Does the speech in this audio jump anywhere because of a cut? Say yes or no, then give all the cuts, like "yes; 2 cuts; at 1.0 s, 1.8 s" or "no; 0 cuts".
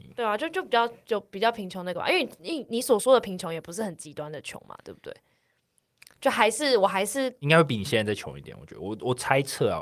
no; 0 cuts